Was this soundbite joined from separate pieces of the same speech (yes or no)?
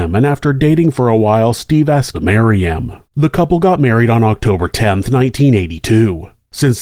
yes